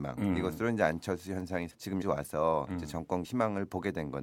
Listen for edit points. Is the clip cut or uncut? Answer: cut